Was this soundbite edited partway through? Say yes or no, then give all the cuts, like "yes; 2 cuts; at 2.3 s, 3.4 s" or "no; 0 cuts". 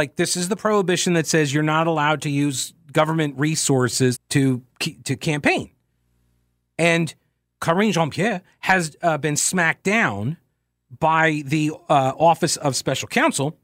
yes; 1 cut; at 4.1 s